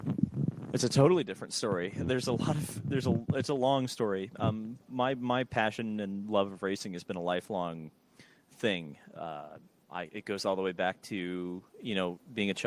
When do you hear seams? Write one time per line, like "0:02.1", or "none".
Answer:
none